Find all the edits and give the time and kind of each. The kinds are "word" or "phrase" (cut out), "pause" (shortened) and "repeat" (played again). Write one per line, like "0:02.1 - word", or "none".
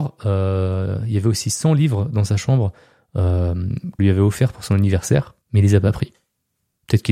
0:04.0 - word
0:05.4 - pause